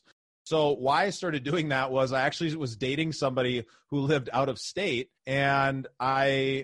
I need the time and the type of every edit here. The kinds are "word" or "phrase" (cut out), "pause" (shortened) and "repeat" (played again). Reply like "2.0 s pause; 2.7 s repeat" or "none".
5.2 s pause